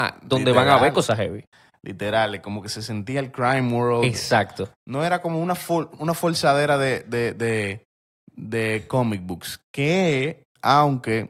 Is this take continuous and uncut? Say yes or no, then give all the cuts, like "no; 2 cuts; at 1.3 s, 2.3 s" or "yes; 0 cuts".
yes; 0 cuts